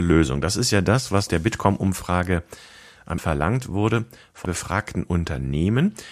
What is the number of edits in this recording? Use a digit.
3